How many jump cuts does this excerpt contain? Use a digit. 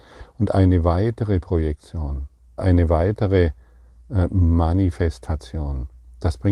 1